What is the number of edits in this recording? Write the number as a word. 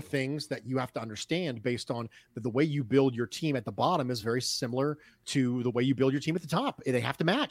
zero